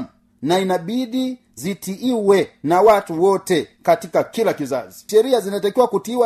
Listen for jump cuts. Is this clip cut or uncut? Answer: cut